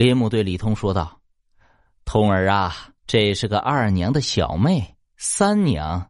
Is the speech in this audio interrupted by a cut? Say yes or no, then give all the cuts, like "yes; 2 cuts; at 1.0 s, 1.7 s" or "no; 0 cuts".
yes; 1 cut; at 3.0 s